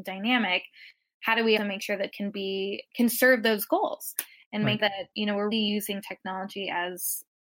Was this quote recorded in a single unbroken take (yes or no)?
no